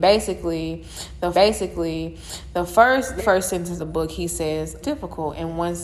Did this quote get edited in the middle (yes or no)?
yes